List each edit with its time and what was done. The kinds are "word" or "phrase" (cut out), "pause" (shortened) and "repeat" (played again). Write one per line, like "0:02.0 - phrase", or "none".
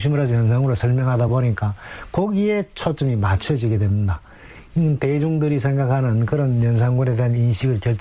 none

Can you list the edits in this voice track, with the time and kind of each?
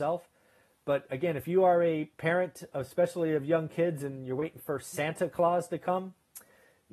none

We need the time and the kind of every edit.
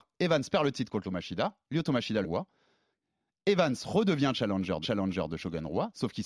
0:01.0 - word
0:02.2 - phrase
0:04.8 - repeat

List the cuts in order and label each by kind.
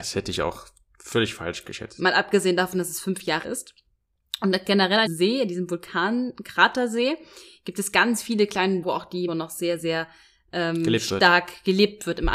0:03.4 - word
0:05.1 - word
0:08.8 - word
0:09.3 - word

